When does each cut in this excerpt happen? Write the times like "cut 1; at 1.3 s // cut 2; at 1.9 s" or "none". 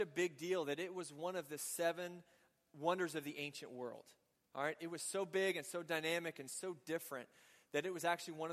none